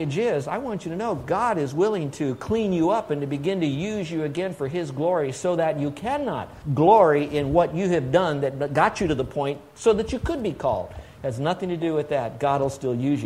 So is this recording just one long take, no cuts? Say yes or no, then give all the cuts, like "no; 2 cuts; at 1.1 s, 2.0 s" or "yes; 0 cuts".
yes; 0 cuts